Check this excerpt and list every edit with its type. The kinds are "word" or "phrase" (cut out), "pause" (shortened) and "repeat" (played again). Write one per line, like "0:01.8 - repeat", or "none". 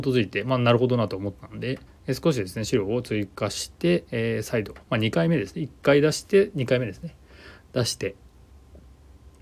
0:01.9 - pause
0:04.1 - pause
0:04.8 - pause